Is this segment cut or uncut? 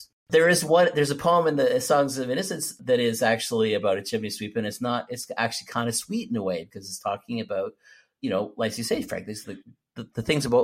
uncut